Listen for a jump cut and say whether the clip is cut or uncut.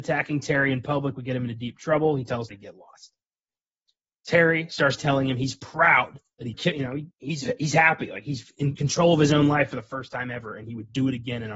cut